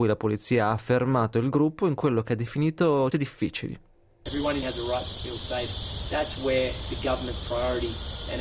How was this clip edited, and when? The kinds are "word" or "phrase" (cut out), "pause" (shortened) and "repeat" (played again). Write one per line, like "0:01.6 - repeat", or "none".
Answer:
0:03.1 - word
0:04.6 - word